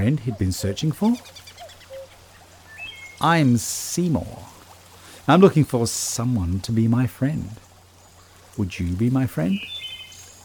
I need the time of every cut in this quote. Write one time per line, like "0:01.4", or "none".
none